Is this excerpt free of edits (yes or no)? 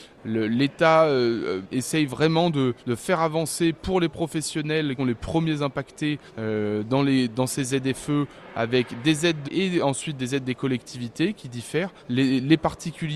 no